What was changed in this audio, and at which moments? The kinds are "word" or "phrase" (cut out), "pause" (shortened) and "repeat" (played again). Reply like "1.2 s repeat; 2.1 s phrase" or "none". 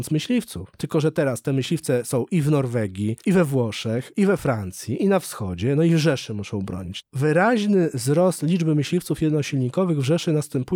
none